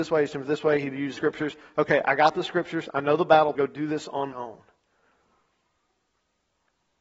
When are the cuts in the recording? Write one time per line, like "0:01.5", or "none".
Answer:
0:01.2
0:03.6
0:04.3